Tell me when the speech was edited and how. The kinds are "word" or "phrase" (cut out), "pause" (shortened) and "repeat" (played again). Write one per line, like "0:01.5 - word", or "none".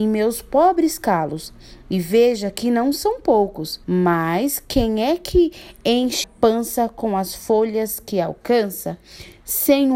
0:03.8 - pause
0:06.2 - word